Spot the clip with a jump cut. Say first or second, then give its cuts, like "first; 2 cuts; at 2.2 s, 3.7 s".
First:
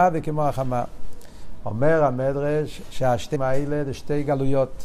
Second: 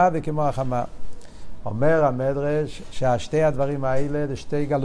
first; 1 cut; at 3.3 s